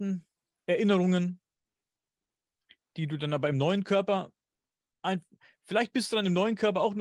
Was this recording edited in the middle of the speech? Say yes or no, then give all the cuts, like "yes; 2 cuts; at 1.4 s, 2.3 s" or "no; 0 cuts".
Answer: no; 0 cuts